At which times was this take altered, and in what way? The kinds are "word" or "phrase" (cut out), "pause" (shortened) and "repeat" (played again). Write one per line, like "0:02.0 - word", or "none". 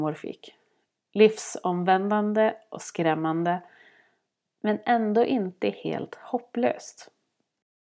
none